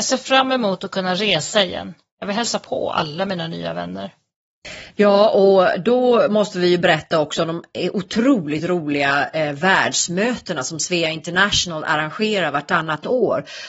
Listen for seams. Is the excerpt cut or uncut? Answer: uncut